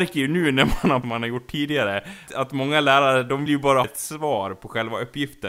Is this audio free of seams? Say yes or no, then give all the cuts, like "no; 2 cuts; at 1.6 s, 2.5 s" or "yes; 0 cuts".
no; 4 cuts; at 1.0 s, 2.3 s, 3.5 s, 3.8 s